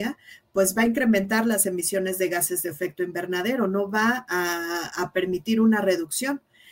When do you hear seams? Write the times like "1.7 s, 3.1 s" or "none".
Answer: none